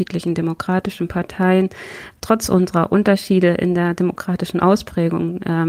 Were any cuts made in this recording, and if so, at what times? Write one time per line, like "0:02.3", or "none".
none